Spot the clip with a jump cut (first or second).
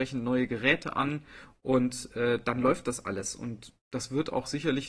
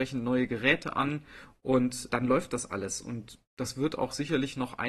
second